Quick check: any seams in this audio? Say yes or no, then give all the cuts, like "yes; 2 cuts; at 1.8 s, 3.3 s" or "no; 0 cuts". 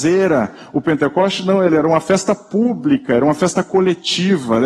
no; 0 cuts